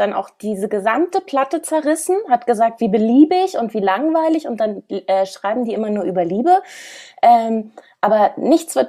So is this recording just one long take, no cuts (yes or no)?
yes